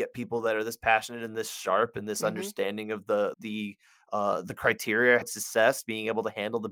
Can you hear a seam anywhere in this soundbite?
yes; 2 cuts; at 3.3 s, 5.2 s

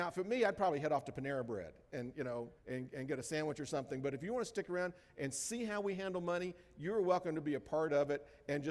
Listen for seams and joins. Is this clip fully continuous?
no; 1 cut; at 2.6 s

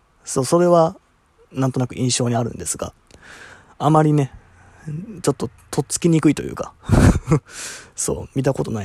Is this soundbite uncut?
yes; 0 cuts

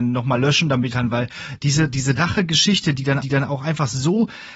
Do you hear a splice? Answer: yes; 3 cuts; at 0.9 s, 2.2 s, 3.2 s

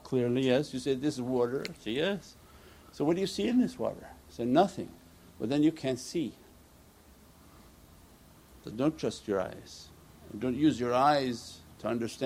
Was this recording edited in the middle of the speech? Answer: no; 0 cuts

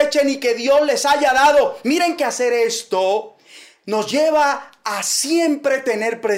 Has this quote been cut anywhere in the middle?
no; 0 cuts

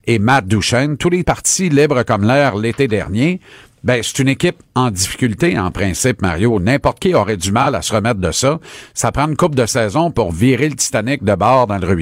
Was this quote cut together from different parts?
yes; 1 cut; at 1.2 s

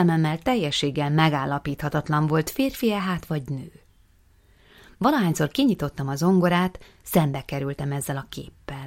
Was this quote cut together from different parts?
no; 0 cuts

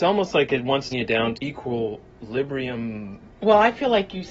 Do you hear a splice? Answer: yes; 3 cuts; at 0.9 s, 1.3 s, 2.1 s

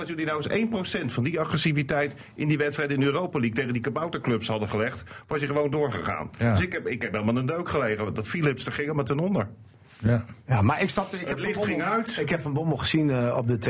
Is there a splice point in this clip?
no; 0 cuts

